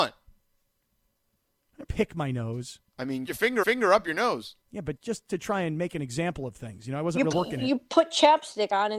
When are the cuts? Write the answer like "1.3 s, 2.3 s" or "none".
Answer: 1.8 s, 2.9 s, 3.2 s, 3.6 s, 4.6 s, 5.0 s, 7.3 s